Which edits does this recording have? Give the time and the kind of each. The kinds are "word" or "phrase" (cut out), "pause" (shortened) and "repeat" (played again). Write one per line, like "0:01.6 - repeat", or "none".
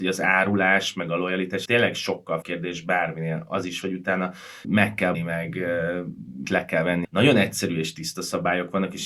0:01.7 - word
0:02.4 - word
0:03.8 - word
0:04.6 - word
0:05.1 - word
0:06.4 - word
0:07.0 - phrase